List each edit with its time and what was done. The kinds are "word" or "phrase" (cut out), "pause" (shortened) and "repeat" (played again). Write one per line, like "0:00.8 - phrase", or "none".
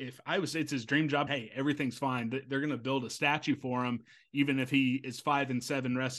0:01.3 - word